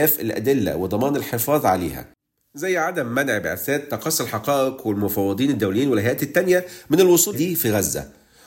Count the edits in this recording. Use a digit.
1